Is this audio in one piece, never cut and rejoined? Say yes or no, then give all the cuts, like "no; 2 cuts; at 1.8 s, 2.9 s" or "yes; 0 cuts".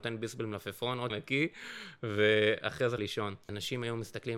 no; 2 cuts; at 1.1 s, 3.0 s